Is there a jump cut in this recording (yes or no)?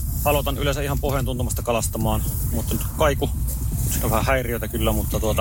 no